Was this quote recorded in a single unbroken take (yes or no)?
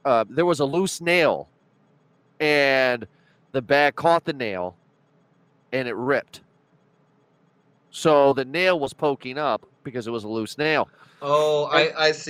yes